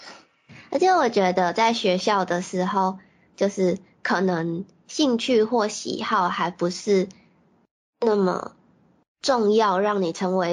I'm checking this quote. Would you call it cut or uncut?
uncut